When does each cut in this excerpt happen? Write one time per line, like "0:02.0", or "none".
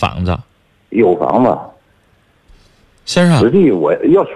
none